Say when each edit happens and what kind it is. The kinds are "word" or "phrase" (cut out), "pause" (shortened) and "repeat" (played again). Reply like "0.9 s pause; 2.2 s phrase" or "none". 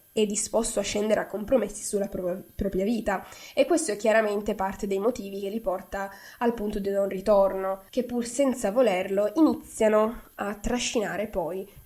7.9 s pause